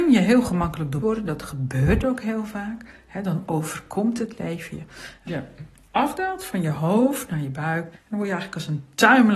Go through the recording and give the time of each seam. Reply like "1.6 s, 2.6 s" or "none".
1.0 s, 5.3 s, 7.9 s